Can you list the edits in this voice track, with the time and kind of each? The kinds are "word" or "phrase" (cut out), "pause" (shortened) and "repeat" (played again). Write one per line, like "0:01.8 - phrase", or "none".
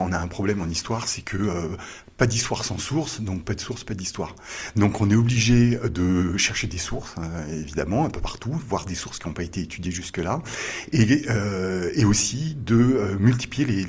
none